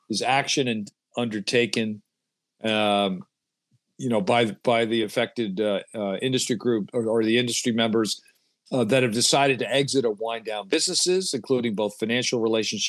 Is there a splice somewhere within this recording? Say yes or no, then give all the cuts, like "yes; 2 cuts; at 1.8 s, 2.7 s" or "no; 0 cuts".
no; 0 cuts